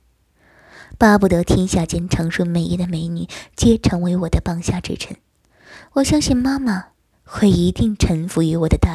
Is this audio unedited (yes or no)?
no